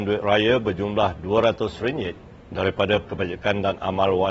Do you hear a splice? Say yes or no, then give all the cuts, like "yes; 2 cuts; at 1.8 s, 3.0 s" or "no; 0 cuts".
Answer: yes; 1 cut; at 3.0 s